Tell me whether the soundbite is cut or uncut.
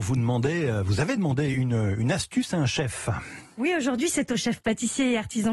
uncut